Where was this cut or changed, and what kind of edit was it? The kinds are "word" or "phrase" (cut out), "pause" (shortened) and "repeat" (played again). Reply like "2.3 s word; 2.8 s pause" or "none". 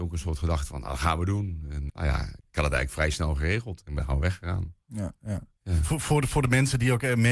1.9 s word; 2.4 s pause